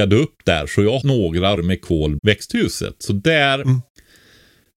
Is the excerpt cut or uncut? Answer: cut